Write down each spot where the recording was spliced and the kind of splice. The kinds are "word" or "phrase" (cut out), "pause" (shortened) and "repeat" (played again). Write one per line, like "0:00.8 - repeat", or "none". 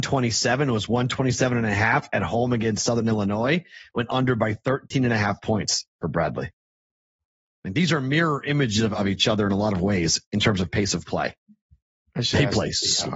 none